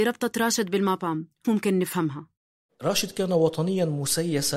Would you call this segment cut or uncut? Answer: cut